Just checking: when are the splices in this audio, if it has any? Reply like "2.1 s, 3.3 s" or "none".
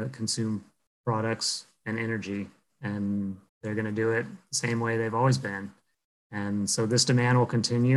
3.5 s